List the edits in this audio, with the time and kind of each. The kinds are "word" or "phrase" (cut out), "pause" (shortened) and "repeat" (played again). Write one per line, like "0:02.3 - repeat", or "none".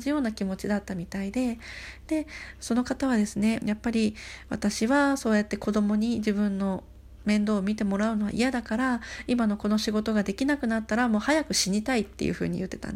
0:03.6 - phrase

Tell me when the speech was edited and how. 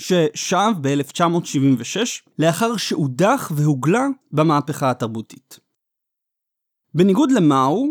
0:02.3 - phrase
0:04.2 - pause

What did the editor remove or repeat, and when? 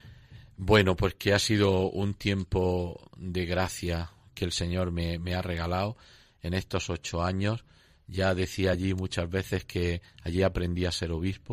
none

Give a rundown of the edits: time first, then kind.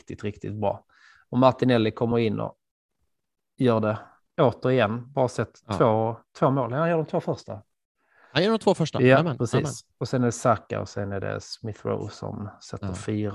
none

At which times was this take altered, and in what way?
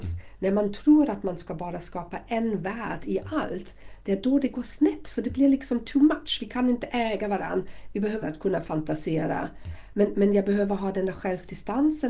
0:08.2 - word

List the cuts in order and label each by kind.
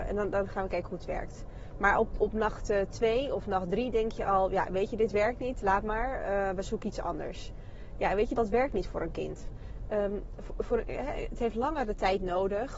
0:02.2 - word
0:08.4 - word

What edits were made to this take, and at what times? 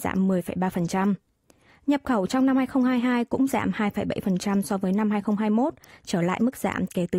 none

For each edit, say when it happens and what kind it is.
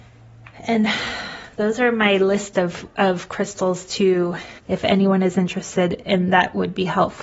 0:04.6 - pause

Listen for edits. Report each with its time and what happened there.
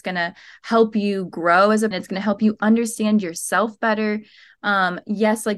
0:01.9 - word

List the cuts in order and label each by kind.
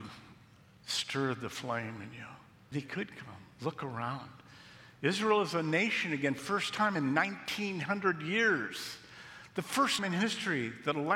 0:02.7 - word
0:06.4 - word
0:10.0 - word

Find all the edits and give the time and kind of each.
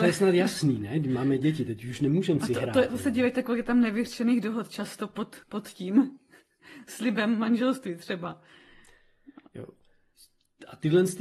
0:05.4 - pause

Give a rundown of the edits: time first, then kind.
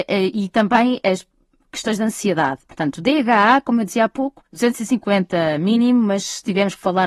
0:04.5 - pause

